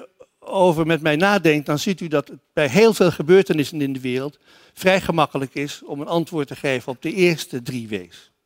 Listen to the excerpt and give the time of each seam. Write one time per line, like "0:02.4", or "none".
none